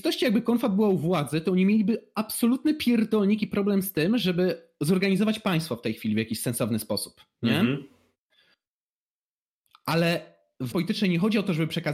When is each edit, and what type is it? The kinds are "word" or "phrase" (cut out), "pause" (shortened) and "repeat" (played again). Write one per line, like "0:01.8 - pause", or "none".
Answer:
0:10.7 - word